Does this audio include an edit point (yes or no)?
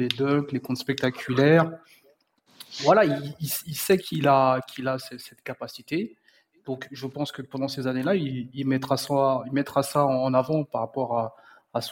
no